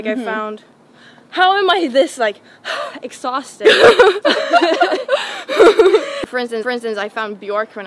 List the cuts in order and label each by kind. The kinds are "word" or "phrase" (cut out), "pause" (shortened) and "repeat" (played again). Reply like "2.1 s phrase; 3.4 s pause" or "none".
6.6 s repeat